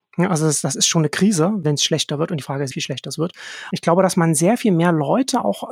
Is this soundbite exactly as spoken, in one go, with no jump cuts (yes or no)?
no